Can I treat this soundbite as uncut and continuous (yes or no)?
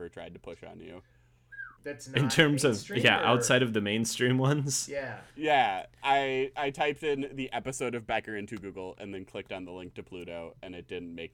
no